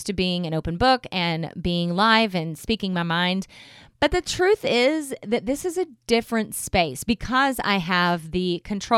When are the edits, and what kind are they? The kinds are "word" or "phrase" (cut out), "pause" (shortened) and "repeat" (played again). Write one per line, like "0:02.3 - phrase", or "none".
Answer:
none